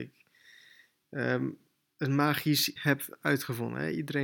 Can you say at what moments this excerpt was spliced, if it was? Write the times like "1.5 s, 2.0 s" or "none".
2.8 s